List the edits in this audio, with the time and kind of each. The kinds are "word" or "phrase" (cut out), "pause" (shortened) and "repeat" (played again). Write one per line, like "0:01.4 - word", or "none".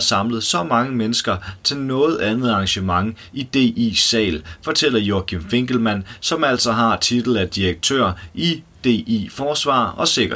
none